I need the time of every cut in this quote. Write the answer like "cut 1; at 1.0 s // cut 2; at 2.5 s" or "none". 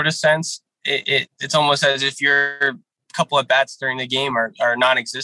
none